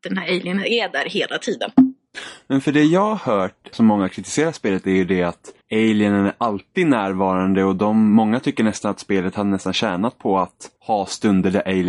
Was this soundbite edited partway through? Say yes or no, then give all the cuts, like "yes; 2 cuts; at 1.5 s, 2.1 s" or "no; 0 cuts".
yes; 3 cuts; at 3.7 s, 5.6 s, 10.8 s